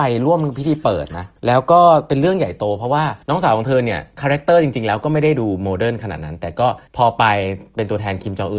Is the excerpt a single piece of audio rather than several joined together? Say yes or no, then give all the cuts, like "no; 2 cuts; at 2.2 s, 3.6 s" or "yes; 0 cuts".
no; 3 cuts; at 1.4 s, 3.2 s, 6.9 s